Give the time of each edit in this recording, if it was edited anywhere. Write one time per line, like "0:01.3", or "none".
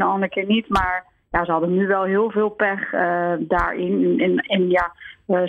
none